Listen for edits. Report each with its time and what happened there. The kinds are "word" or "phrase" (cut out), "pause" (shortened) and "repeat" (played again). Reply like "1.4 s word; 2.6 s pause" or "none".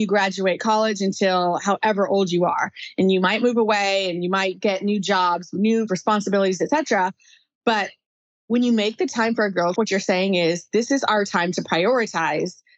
5.9 s word; 9.7 s word